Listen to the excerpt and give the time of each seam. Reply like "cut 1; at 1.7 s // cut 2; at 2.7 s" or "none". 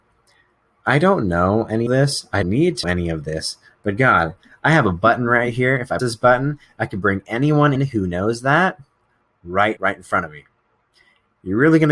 cut 1; at 1.9 s // cut 2; at 2.4 s // cut 3; at 2.8 s // cut 4; at 6.0 s // cut 5; at 7.8 s // cut 6; at 9.8 s